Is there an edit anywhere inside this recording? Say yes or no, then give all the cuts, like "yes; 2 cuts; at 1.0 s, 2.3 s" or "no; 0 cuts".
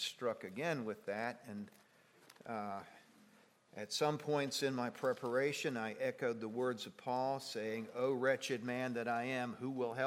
no; 0 cuts